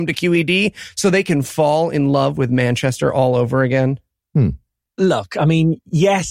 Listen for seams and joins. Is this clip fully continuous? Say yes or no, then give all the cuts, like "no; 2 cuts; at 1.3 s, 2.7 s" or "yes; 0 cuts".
yes; 0 cuts